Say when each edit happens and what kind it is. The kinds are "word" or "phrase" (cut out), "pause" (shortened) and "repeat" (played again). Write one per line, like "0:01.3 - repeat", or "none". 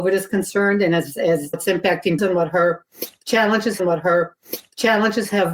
0:01.5 - word
0:02.2 - word
0:03.8 - repeat